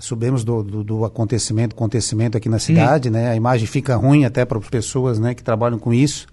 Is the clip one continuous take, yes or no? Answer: no